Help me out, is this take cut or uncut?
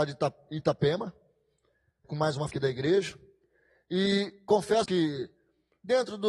cut